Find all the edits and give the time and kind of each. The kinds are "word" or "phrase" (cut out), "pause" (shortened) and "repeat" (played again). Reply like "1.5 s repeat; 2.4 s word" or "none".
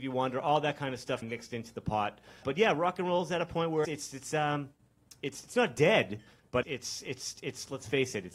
1.2 s word; 2.4 s word; 3.8 s word; 6.6 s word